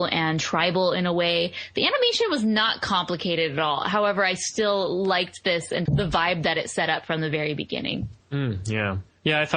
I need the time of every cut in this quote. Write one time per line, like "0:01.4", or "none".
0:05.9
0:08.2